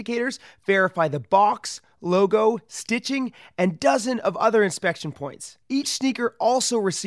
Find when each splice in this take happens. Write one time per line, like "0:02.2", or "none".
0:05.6